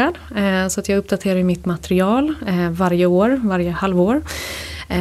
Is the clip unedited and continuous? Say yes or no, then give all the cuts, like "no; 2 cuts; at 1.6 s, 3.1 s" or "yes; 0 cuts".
yes; 0 cuts